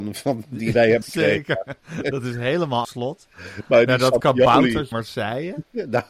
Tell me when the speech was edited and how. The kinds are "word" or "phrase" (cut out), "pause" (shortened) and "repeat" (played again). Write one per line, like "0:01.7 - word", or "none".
0:01.0 - word
0:02.8 - word
0:04.9 - word